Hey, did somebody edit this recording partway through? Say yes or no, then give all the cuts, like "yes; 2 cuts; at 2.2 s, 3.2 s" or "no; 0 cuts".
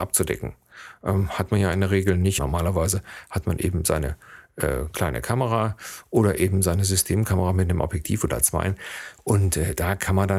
yes; 1 cut; at 2.4 s